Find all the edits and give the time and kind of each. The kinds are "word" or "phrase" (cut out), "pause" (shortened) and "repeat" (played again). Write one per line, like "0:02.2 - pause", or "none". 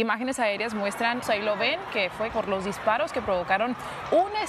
0:01.2 - phrase
0:02.3 - word